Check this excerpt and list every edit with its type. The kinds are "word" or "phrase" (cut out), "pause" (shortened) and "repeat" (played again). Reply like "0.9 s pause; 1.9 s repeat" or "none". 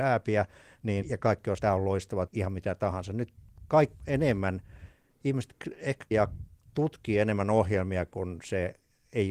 1.0 s word; 1.6 s word; 2.3 s word; 4.0 s word; 6.1 s word